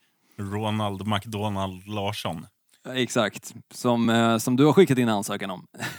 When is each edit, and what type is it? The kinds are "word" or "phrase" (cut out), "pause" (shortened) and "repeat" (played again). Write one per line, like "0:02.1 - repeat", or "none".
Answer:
none

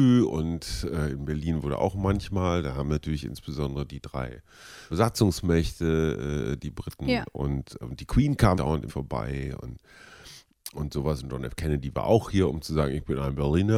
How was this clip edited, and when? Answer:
0:04.9 - word
0:07.8 - word
0:08.5 - word
0:08.9 - word

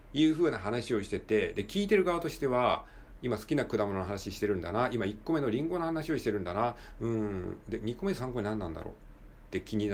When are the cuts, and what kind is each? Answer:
0:03.2 - word

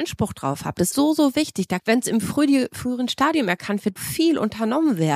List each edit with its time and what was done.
0:00.9 - word
0:01.8 - word
0:04.0 - word

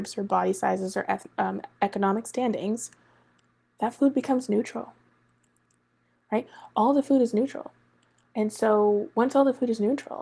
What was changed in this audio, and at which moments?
none

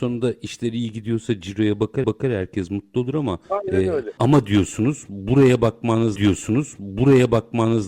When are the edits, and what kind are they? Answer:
0:02.0 - repeat
0:06.2 - repeat

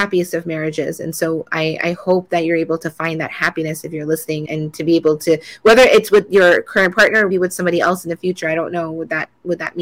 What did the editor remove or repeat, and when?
0:04.5 - word
0:07.3 - word

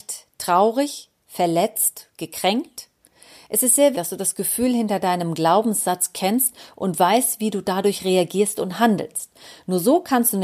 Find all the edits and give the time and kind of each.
0:03.9 - word

